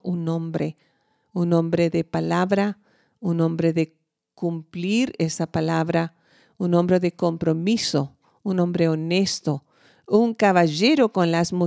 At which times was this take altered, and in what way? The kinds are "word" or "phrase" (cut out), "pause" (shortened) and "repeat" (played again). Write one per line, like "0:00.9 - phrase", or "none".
none